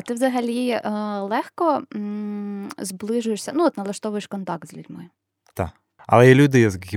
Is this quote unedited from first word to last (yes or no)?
yes